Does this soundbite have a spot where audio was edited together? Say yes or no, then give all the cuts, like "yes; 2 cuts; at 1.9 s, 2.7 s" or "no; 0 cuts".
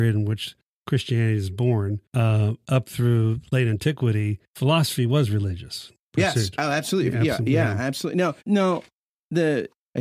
yes; 3 cuts; at 2.0 s, 4.5 s, 8.4 s